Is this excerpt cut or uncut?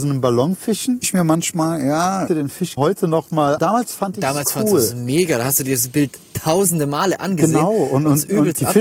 cut